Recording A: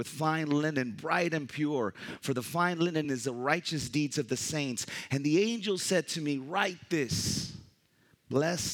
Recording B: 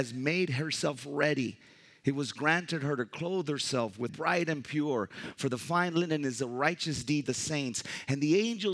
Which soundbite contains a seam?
B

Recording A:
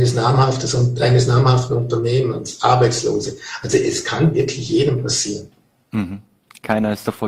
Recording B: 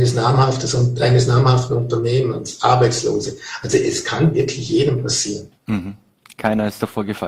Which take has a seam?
B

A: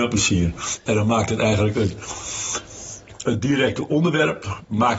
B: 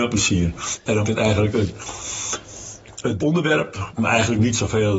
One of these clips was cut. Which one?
B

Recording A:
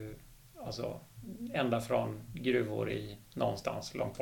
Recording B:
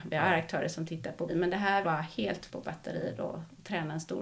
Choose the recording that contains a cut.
B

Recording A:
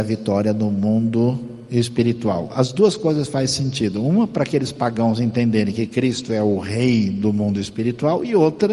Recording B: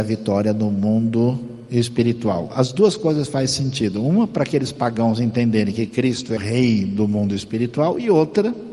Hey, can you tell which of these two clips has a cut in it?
B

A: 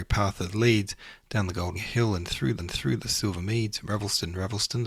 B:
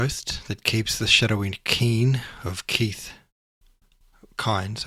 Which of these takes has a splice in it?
A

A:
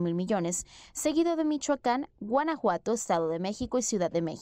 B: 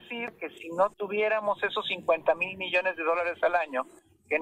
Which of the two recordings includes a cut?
B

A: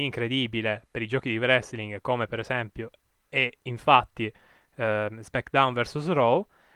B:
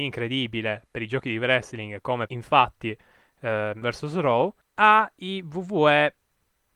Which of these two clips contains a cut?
B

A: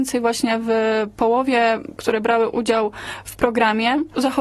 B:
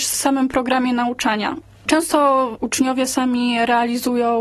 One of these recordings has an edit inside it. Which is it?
A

